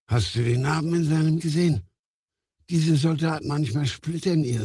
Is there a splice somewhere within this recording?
yes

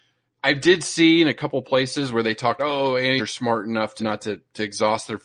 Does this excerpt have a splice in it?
yes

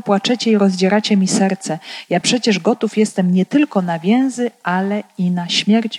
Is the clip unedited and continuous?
yes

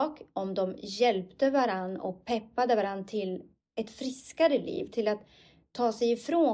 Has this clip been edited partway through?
no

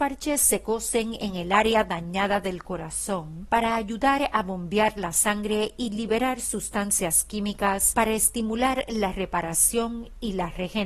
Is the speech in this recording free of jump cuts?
yes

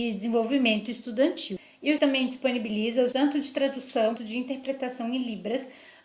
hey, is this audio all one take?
no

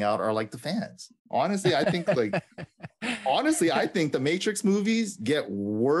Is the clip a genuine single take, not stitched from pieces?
no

